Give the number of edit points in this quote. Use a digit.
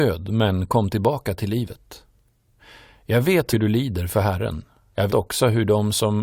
2